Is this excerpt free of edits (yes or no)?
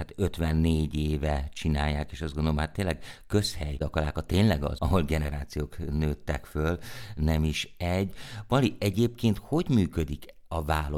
no